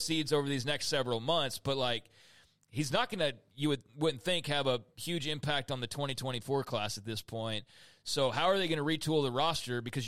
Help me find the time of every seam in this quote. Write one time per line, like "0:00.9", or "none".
none